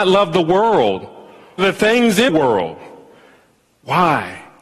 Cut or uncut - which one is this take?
cut